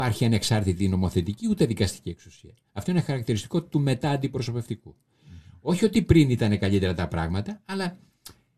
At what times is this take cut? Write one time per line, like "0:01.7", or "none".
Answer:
none